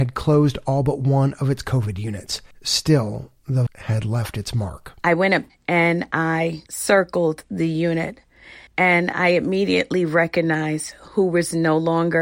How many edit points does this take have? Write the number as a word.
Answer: six